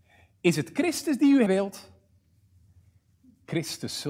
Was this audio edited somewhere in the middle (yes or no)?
yes